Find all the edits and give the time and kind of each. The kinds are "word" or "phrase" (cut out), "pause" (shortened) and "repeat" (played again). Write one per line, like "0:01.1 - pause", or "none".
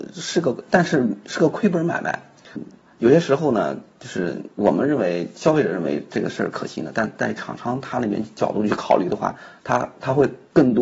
0:02.6 - word
0:04.5 - pause